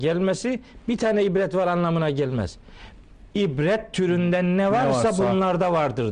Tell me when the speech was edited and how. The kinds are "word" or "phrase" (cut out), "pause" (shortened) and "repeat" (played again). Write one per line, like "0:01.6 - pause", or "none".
none